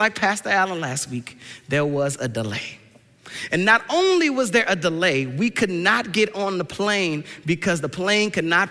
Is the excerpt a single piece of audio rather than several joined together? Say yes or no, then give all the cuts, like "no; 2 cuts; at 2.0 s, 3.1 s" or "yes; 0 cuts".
yes; 0 cuts